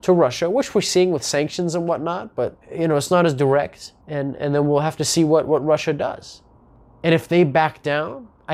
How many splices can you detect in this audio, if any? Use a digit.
3